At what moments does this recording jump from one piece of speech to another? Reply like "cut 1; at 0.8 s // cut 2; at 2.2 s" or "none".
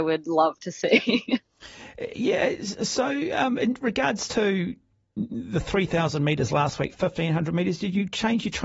none